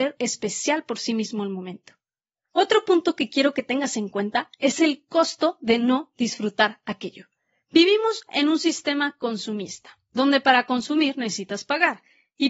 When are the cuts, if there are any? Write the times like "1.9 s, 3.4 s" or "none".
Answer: none